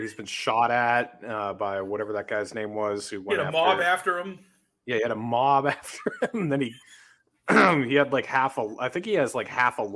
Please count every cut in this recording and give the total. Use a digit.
0